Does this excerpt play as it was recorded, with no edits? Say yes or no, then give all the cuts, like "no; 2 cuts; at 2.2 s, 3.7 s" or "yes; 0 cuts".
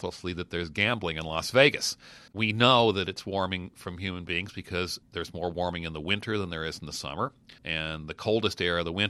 no; 2 cuts; at 2.3 s, 7.6 s